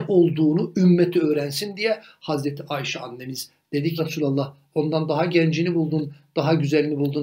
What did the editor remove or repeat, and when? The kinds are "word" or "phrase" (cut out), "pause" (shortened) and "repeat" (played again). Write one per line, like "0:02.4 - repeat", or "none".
0:04.0 - word